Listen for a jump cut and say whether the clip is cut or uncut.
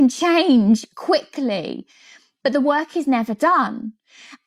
uncut